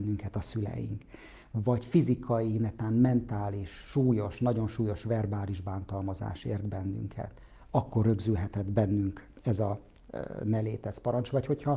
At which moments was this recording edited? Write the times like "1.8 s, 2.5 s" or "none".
none